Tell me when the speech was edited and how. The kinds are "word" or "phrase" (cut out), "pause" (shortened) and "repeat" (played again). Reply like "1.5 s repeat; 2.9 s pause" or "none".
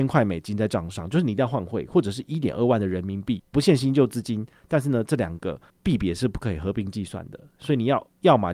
3.5 s pause; 5.7 s pause